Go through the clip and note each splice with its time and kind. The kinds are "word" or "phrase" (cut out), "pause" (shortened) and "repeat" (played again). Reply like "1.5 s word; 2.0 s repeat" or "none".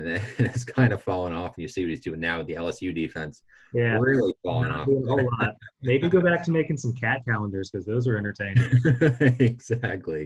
none